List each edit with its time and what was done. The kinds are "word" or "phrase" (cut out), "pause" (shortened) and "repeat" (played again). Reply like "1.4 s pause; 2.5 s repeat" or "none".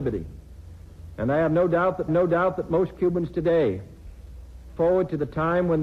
2.1 s repeat; 4.8 s word